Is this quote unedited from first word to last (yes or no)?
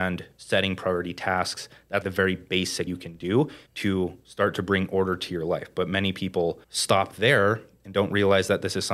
no